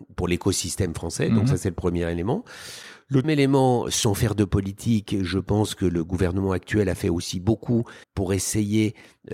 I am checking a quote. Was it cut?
yes; 2 cuts; at 3.2 s, 8.0 s

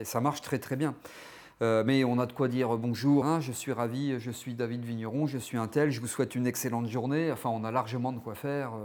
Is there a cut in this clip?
yes; 1 cut; at 3.2 s

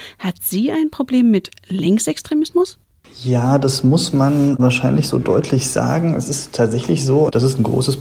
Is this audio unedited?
yes; 0 cuts

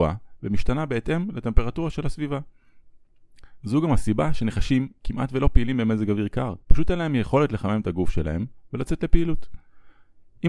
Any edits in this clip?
yes; 1 cut; at 6.6 s

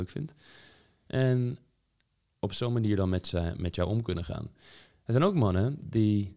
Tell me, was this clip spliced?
no; 0 cuts

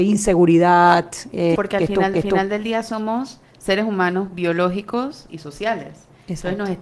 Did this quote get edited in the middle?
yes; 4 cuts; at 1.6 s, 2.1 s, 3.5 s, 5.3 s

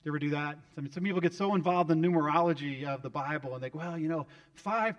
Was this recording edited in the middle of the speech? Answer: no; 0 cuts

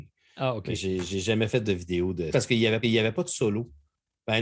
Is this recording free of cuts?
no; 2 cuts; at 2.3 s, 2.8 s

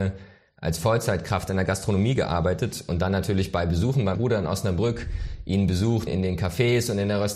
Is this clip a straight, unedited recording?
no; 2 cuts; at 4.1 s, 6.1 s

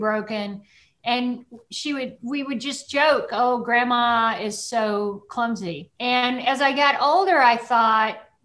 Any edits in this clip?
yes; 1 cut; at 5.9 s

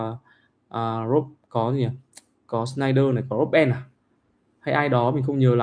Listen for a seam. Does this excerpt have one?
no; 0 cuts

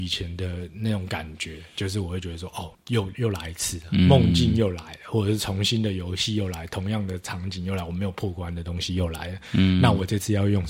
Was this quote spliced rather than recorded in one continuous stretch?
yes; 1 cut; at 2.7 s

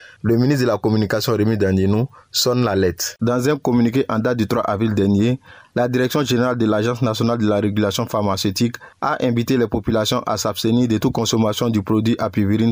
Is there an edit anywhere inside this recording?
no; 0 cuts

